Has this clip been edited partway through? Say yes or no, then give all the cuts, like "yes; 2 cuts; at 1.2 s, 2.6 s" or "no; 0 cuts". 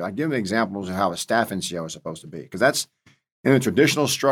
no; 0 cuts